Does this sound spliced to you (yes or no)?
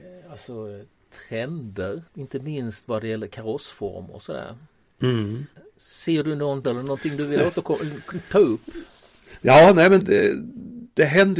yes